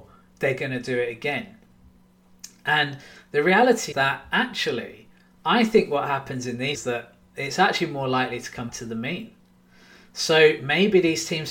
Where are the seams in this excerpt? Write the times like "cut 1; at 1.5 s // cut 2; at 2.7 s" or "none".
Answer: cut 1; at 3.9 s // cut 2; at 6.7 s // cut 3; at 8.7 s